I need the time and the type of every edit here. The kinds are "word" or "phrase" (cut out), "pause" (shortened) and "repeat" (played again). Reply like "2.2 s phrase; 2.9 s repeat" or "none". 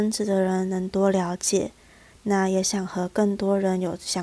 none

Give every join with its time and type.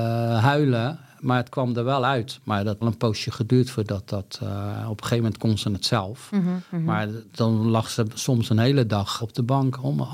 2.8 s phrase; 9.2 s word

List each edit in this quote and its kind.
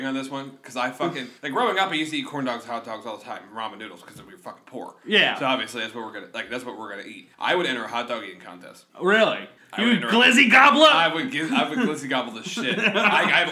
1.4 s pause; 7.3 s pause; 8.9 s pause; 9.6 s pause

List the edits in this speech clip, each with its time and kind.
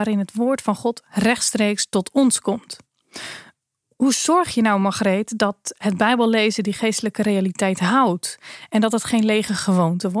none

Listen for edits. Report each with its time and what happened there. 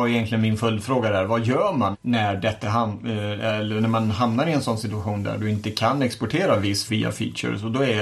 1.9 s word; 2.6 s word; 6.9 s word

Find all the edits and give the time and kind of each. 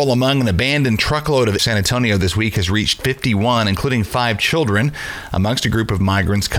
1.6 s phrase

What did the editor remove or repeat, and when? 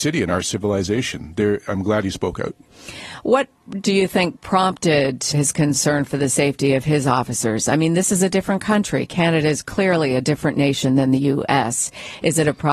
5.3 s phrase

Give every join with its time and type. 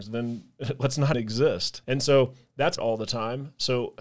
1.1 s word; 1.8 s pause; 2.8 s phrase

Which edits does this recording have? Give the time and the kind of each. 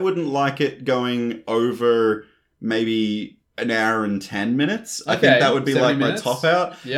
3.5 s pause

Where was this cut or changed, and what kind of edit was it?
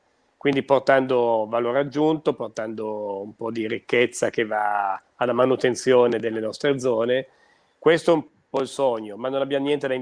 none

